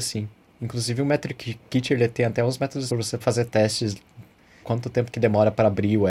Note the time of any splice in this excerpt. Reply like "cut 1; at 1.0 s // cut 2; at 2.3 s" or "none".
cut 1; at 2.9 s // cut 2; at 3.2 s // cut 3; at 4.6 s